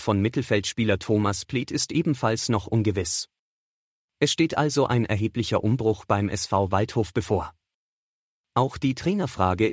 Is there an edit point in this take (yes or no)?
no